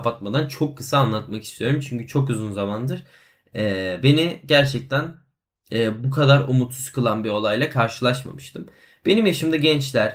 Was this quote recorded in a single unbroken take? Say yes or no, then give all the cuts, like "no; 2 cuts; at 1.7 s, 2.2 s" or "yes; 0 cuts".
yes; 0 cuts